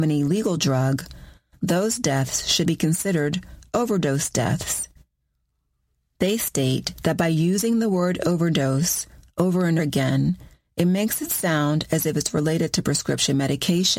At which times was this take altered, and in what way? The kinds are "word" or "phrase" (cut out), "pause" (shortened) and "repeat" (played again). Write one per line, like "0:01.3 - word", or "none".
0:02.6 - word
0:09.8 - word